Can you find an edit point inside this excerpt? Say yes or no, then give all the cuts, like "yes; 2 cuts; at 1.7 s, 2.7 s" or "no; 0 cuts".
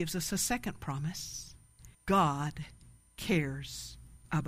yes; 1 cut; at 1.9 s